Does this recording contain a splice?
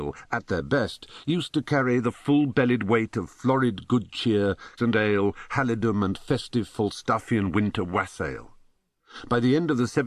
yes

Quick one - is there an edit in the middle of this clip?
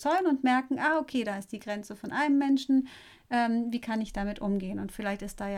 no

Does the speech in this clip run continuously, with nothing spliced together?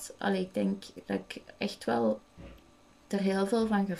yes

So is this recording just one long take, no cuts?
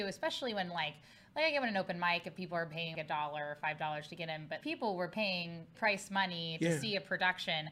no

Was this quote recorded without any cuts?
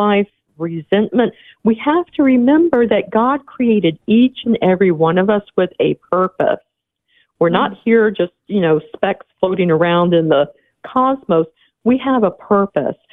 yes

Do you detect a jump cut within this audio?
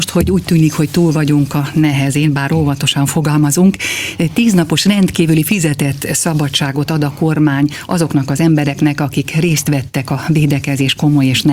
no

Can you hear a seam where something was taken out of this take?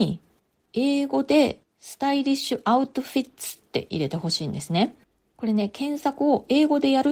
no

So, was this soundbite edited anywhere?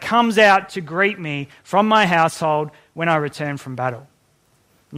no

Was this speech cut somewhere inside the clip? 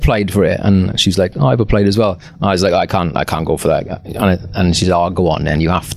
no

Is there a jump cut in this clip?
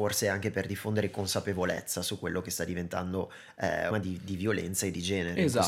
yes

